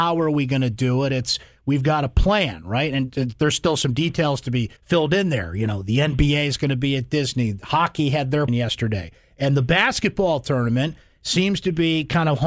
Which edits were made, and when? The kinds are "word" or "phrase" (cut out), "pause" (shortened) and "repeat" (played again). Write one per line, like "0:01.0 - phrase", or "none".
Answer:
0:04.8 - pause
0:08.5 - word